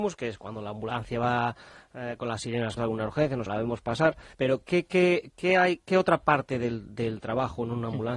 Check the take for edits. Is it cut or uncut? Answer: cut